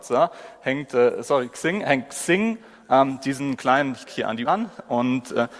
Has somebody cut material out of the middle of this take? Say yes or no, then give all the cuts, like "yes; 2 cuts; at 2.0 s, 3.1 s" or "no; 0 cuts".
yes; 2 cuts; at 4.1 s, 4.5 s